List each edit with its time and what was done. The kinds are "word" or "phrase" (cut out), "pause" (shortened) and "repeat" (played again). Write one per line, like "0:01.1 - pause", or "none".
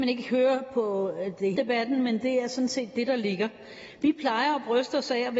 0:01.5 - word